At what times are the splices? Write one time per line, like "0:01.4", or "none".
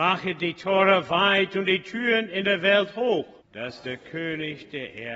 0:03.4